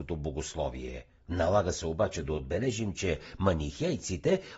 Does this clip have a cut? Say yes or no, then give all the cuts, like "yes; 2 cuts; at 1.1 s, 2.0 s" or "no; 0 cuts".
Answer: yes; 1 cut; at 1.2 s